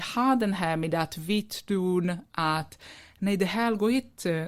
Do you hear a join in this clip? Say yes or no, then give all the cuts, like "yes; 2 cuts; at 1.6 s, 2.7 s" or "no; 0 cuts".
no; 0 cuts